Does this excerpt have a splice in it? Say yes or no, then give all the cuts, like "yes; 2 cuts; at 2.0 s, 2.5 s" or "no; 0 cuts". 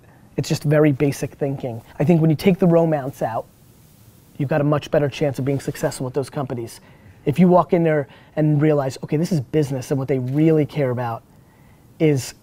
yes; 1 cut; at 1.9 s